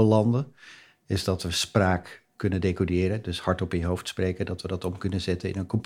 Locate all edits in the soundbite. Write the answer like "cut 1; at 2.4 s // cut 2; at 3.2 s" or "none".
none